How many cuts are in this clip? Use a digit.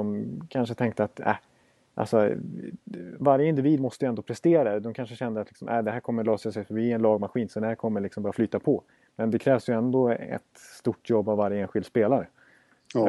0